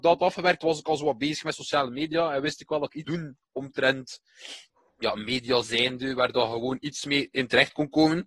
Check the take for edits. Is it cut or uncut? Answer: cut